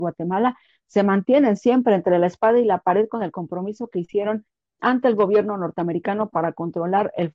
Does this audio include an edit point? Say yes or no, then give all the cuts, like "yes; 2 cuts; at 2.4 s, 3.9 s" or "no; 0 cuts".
no; 0 cuts